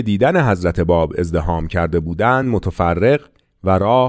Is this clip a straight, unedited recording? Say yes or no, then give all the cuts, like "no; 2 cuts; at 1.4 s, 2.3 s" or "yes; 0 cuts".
yes; 0 cuts